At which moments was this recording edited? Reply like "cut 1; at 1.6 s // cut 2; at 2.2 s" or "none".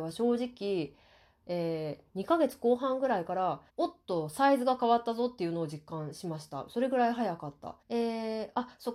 cut 1; at 2.1 s // cut 2; at 3.7 s // cut 3; at 7.8 s